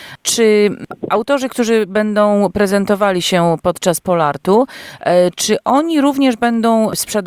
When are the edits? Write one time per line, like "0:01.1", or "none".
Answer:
none